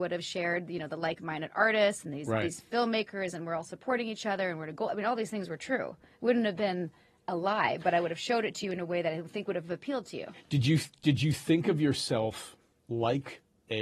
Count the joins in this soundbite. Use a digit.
0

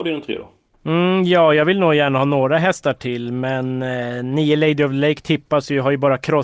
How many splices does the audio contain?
0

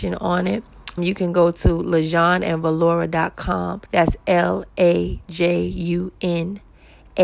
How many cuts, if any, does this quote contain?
2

